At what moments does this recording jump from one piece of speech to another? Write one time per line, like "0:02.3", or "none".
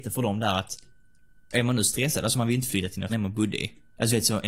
0:03.1